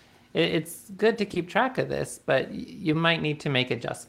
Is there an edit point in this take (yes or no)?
no